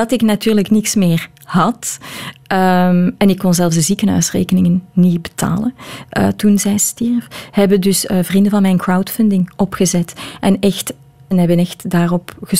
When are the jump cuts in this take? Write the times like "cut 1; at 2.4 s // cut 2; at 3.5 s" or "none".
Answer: cut 1; at 11.3 s